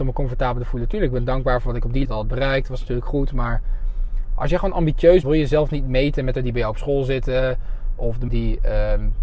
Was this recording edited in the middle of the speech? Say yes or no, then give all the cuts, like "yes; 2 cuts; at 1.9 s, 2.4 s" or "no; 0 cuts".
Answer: yes; 4 cuts; at 2.0 s, 5.2 s, 6.3 s, 8.3 s